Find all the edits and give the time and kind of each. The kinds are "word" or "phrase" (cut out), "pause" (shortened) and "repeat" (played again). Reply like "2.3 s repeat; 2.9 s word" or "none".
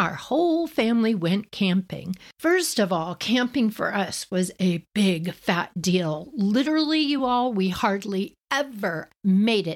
none